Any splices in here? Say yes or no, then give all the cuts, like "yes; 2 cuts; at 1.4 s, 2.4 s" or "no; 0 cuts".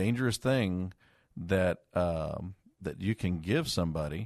no; 0 cuts